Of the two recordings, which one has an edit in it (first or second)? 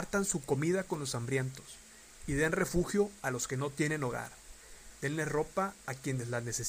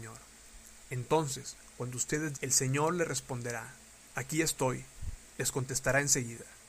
second